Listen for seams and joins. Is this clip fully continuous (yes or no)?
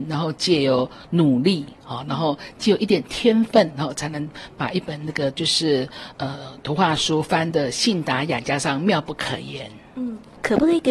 yes